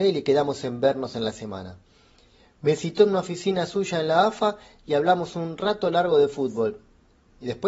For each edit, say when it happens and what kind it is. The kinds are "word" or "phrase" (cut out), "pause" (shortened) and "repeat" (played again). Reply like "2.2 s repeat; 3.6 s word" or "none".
none